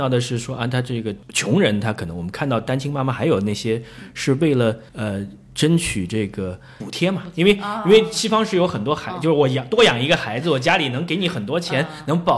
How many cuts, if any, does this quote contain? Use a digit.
1